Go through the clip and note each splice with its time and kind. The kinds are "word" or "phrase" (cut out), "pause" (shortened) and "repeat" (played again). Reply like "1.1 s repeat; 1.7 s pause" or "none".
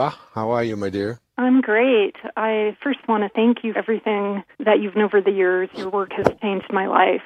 1.3 s pause; 3.0 s word; 3.7 s word; 4.5 s pause; 4.9 s word